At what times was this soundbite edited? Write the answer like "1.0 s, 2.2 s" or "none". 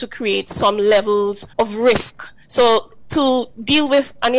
1.5 s, 2.4 s